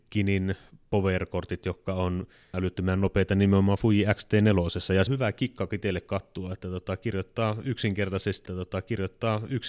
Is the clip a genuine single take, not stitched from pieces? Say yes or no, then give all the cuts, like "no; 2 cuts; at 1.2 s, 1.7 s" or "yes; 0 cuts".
no; 3 cuts; at 2.5 s, 5.1 s, 8.5 s